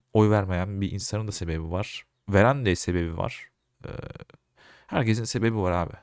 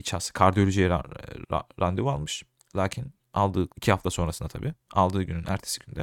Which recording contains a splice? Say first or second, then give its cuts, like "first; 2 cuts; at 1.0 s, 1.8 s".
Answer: second; 3 cuts; at 1.4 s, 2.6 s, 3.7 s